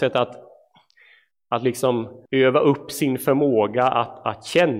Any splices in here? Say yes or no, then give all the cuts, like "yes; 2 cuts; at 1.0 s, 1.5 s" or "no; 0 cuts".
yes; 1 cut; at 2.3 s